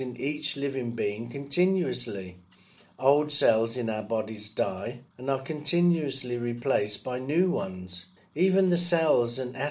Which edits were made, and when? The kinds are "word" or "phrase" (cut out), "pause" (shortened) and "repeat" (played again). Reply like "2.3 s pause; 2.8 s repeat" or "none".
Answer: 2.6 s pause; 5.1 s pause; 8.2 s pause